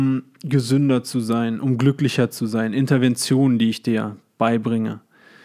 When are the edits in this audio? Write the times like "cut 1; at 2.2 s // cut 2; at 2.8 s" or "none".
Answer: none

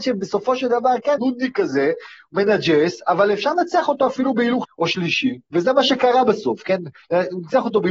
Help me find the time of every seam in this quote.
cut 1; at 1.2 s // cut 2; at 4.6 s

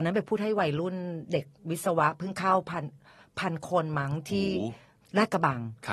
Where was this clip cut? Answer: none

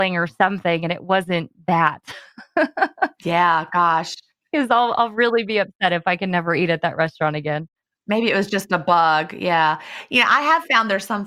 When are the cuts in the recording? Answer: none

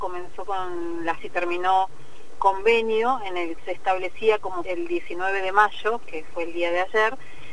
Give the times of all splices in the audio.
cut 1; at 1.2 s // cut 2; at 2.4 s // cut 3; at 3.6 s // cut 4; at 4.6 s

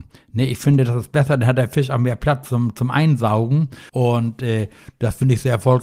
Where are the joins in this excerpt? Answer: cut 1; at 3.9 s

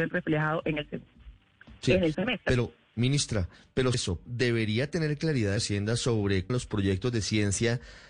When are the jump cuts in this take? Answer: cut 1; at 2.1 s // cut 2; at 3.9 s // cut 3; at 4.2 s // cut 4; at 5.6 s // cut 5; at 6.5 s

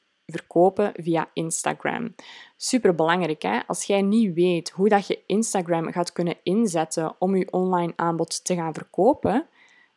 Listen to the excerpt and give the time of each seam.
none

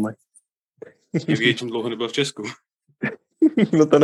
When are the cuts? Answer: cut 1; at 1.6 s

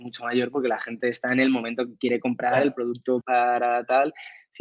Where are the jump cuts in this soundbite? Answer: cut 1; at 3.2 s

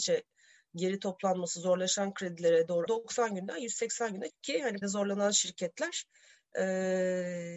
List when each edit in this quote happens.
cut 1; at 2.9 s // cut 2; at 4.3 s // cut 3; at 4.8 s

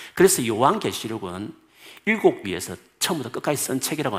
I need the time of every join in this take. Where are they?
cut 1; at 2.4 s

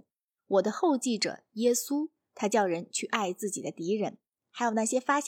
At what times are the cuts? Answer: none

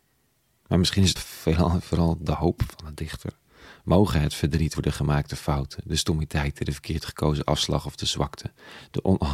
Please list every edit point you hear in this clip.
cut 1; at 1.2 s // cut 2; at 4.7 s

